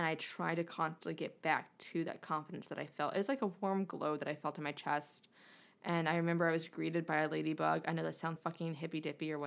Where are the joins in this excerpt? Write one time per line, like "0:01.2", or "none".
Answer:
0:08.4